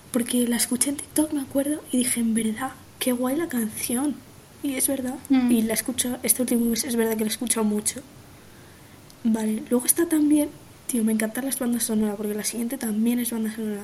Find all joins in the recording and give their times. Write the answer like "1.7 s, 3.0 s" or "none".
none